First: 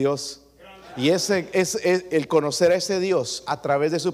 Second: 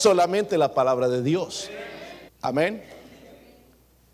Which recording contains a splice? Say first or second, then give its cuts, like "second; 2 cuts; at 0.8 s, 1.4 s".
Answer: second; 1 cut; at 2.3 s